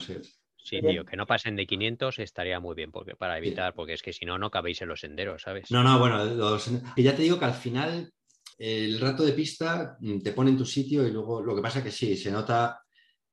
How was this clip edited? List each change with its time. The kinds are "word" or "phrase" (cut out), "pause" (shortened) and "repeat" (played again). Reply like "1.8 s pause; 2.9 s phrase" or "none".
7.0 s word; 8.5 s pause

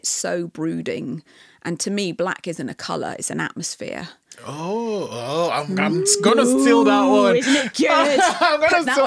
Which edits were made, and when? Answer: none

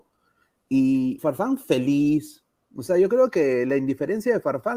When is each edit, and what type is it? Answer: 1.2 s word

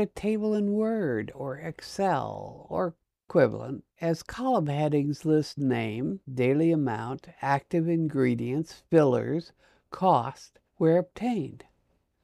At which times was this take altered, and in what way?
3.9 s pause; 6.2 s pause; 10.7 s pause

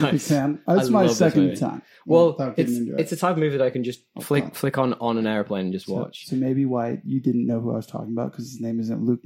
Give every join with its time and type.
none

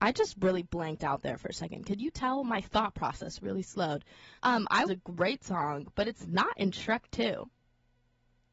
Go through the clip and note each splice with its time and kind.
4.4 s pause; 4.9 s phrase

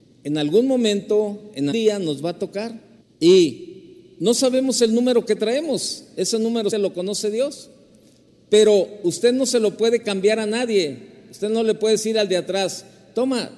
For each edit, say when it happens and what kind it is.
1.7 s word; 3.0 s pause; 6.7 s word

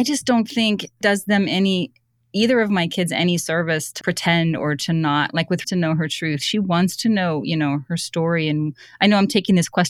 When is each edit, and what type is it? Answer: 1.0 s phrase; 4.0 s word; 5.6 s phrase

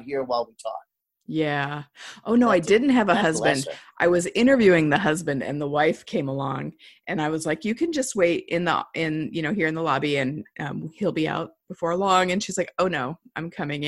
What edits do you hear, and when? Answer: none

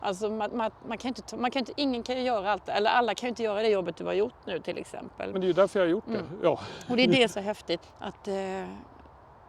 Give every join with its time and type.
5.3 s word; 7.3 s phrase; 7.8 s word

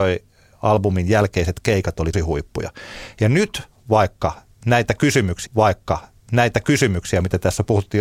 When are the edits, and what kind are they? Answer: 2.1 s word; 5.5 s repeat

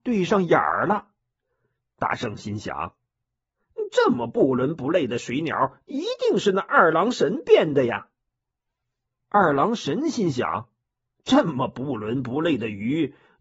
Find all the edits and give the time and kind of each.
none

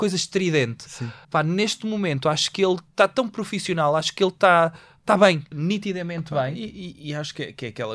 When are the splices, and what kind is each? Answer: 1.2 s pause; 5.5 s word

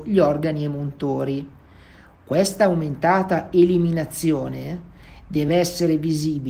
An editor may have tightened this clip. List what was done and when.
none

